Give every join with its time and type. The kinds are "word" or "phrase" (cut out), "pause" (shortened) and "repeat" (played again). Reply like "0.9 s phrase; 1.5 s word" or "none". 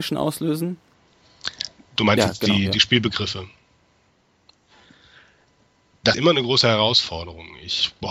6.1 s word